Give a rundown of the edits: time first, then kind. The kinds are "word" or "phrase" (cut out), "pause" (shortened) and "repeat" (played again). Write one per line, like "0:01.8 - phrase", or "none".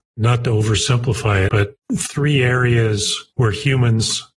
0:01.5 - word